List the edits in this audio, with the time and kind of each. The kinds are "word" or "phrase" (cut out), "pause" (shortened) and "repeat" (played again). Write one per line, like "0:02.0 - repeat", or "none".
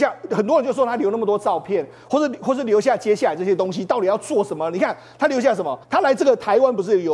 0:05.8 - pause